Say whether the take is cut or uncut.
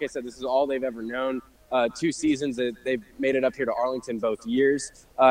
uncut